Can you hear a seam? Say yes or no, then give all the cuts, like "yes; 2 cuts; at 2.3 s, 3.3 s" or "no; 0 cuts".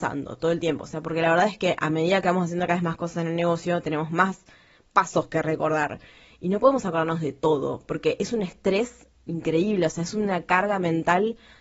no; 0 cuts